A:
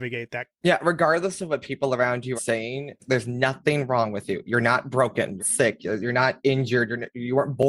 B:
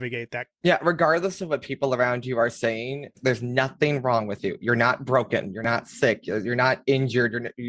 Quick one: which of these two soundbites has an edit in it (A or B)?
A